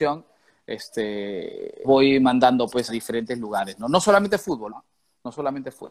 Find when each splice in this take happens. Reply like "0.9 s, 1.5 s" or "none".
1.8 s, 2.9 s, 4.7 s